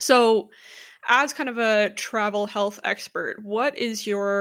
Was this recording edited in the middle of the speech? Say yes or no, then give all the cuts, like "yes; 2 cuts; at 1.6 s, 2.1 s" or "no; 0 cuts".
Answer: no; 0 cuts